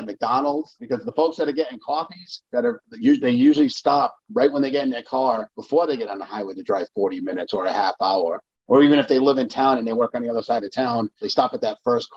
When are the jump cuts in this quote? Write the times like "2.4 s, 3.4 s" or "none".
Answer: none